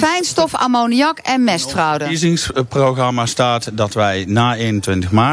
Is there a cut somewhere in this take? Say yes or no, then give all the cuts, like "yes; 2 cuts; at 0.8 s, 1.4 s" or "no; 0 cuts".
no; 0 cuts